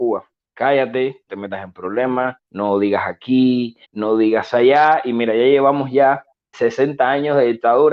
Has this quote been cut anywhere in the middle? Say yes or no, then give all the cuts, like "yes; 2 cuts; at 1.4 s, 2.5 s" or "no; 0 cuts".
yes; 4 cuts; at 1.3 s, 2.4 s, 3.8 s, 6.5 s